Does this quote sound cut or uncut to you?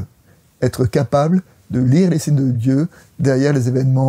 uncut